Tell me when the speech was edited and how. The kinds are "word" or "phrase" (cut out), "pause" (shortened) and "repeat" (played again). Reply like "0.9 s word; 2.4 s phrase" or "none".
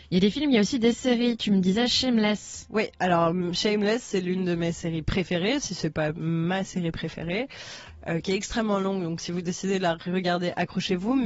none